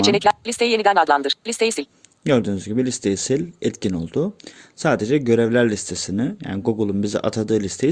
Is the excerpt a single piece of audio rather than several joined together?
yes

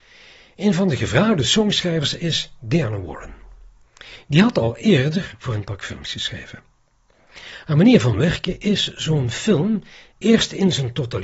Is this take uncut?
yes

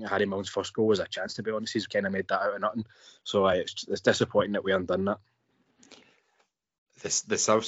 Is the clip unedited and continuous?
yes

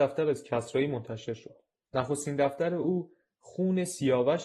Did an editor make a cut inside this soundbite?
no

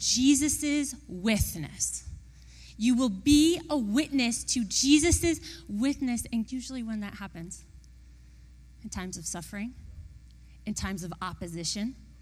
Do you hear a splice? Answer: yes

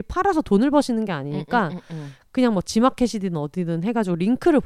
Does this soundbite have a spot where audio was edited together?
no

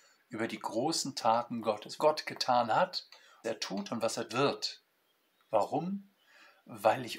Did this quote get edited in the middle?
yes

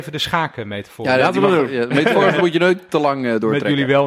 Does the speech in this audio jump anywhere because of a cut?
no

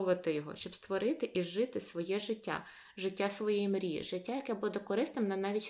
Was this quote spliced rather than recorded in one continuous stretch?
no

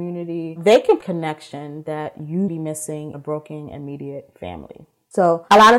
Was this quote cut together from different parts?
yes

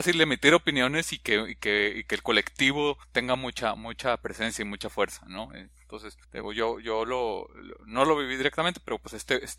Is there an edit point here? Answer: yes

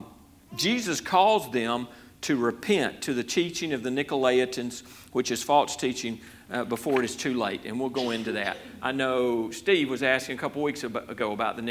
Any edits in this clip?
no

